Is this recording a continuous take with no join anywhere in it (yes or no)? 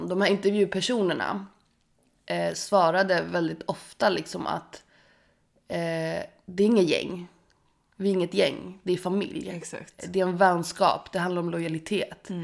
yes